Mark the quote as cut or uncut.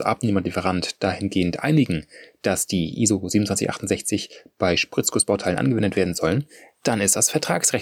uncut